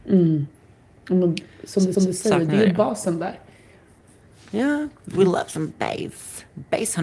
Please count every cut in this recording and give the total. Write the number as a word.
one